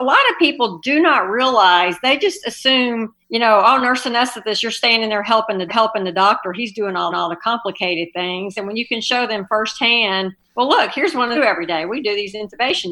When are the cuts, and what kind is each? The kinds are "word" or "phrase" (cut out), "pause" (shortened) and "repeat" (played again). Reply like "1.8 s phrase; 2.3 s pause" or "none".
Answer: 3.2 s pause; 5.7 s repeat; 7.1 s repeat; 10.4 s pause; 11.3 s phrase